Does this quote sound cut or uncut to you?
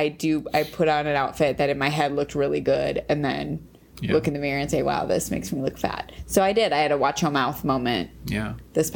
uncut